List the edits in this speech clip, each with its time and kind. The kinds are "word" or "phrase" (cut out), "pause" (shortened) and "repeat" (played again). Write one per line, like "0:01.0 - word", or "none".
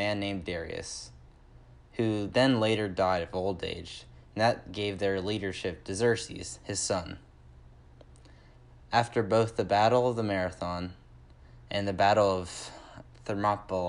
none